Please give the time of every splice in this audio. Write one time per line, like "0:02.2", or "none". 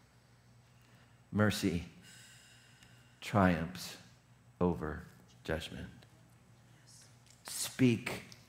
none